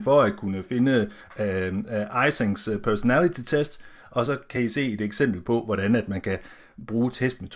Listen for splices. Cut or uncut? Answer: uncut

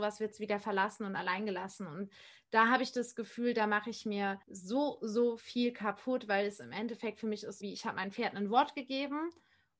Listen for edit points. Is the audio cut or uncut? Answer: cut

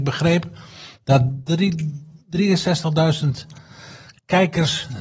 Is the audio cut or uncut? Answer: uncut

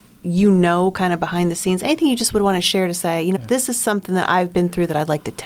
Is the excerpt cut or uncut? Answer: cut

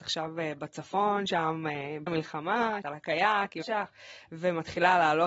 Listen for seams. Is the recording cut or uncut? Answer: cut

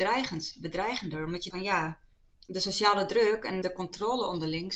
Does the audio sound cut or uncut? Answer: cut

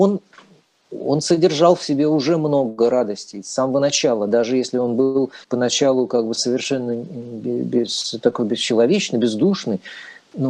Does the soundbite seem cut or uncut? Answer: cut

